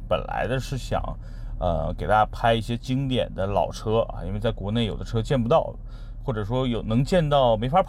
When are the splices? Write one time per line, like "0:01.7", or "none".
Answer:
none

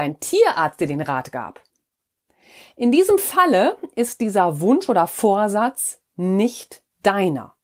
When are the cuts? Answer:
none

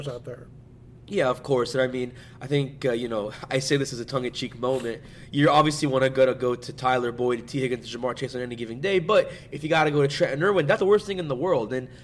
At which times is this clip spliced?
0:10.8

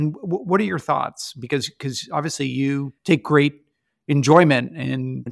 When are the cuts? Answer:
0:03.0

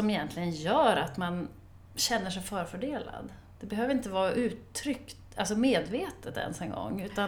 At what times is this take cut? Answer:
0:01.8

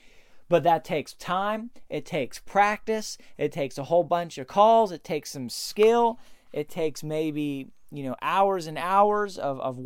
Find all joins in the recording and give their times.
none

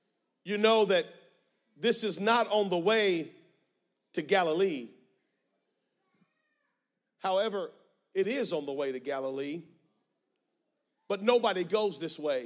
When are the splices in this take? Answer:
none

